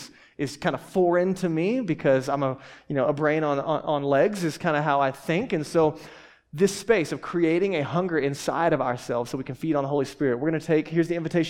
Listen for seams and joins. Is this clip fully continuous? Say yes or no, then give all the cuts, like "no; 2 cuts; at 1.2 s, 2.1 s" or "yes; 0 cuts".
yes; 0 cuts